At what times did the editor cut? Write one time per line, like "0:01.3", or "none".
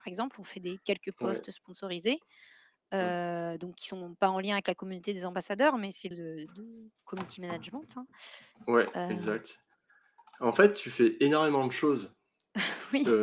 0:06.1